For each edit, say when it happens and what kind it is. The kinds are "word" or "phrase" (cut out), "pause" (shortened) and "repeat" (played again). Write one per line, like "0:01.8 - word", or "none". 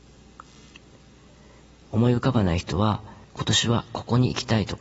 0:03.2 - pause